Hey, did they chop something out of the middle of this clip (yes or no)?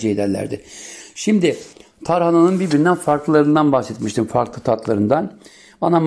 no